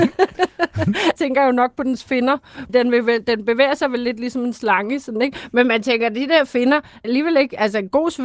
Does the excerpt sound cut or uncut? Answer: cut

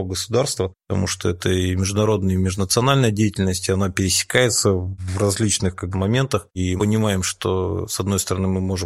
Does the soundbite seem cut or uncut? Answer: cut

